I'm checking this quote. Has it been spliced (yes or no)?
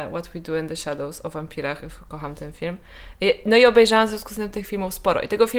no